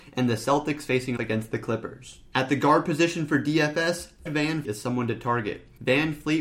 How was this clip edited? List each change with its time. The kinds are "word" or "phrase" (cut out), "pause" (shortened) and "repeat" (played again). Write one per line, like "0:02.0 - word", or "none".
0:01.2 - word
0:04.3 - word
0:04.6 - word